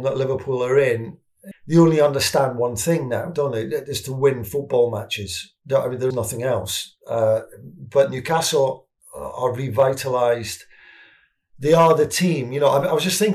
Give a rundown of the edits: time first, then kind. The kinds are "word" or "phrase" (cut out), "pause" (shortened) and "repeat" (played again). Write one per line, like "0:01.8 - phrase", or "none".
0:01.5 - word
0:06.1 - word